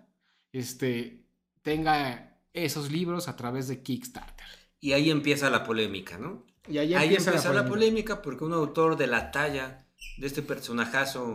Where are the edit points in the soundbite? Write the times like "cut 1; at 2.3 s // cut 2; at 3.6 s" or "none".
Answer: none